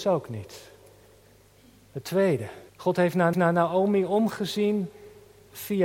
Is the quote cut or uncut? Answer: cut